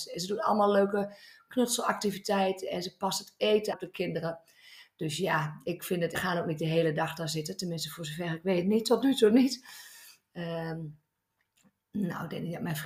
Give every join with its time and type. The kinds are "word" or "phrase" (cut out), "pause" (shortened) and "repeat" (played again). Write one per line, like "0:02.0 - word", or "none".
0:03.7 - word
0:06.1 - word